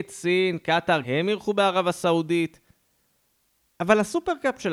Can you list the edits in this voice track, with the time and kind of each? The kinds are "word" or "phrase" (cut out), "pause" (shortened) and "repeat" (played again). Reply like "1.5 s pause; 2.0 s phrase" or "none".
1.0 s word